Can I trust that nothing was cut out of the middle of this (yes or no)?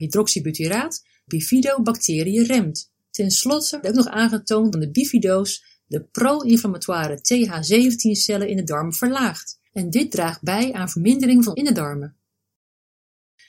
no